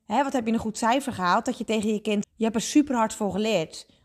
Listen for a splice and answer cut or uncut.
cut